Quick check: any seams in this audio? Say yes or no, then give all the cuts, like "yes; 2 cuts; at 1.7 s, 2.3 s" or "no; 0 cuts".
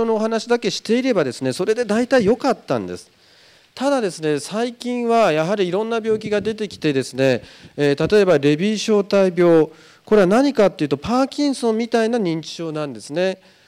no; 0 cuts